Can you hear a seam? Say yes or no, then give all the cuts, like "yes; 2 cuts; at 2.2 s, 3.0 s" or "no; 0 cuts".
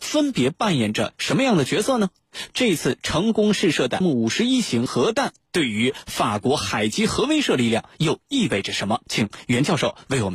yes; 2 cuts; at 4.0 s, 9.0 s